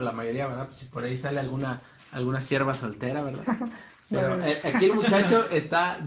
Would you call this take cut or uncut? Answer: uncut